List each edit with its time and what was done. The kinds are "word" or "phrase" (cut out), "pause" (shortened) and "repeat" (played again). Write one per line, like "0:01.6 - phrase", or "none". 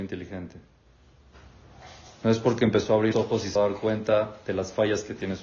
0:03.1 - word
0:03.6 - word